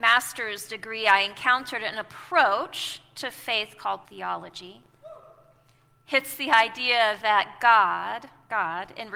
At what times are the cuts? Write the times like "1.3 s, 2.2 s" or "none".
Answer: 4.0 s